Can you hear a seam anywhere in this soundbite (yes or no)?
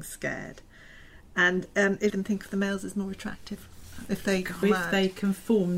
yes